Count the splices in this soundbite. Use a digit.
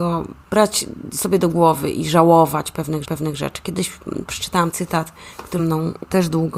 3